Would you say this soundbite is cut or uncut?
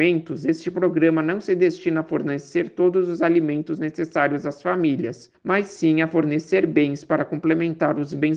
uncut